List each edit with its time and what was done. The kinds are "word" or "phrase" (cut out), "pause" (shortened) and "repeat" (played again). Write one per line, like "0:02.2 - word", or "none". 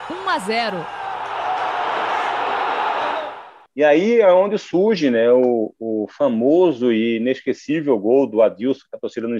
none